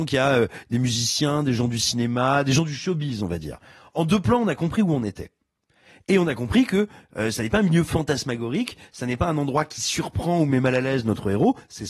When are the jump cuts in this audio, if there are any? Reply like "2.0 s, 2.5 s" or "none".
none